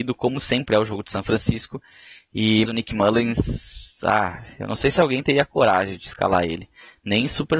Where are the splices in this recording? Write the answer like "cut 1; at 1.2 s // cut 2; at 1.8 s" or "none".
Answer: cut 1; at 2.6 s